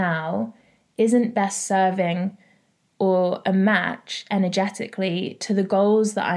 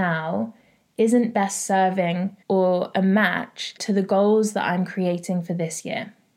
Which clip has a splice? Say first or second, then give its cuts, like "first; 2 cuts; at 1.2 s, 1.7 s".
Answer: second; 2 cuts; at 2.4 s, 3.8 s